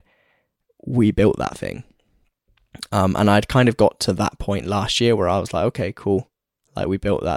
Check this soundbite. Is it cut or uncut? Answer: uncut